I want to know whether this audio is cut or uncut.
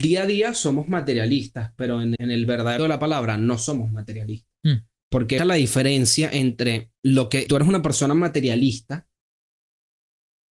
cut